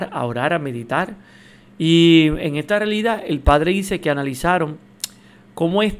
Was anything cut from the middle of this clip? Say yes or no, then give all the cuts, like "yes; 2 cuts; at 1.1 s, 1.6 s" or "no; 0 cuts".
no; 0 cuts